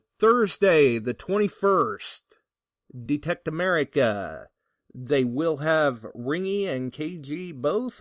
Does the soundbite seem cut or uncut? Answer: uncut